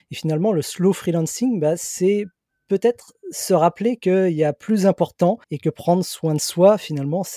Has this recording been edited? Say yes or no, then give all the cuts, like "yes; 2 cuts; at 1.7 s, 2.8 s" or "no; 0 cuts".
yes; 2 cuts; at 2.5 s, 5.4 s